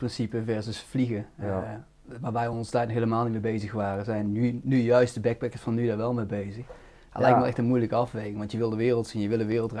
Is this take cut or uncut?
uncut